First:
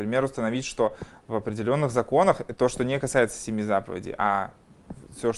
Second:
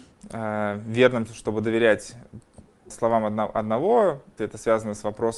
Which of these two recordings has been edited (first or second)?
second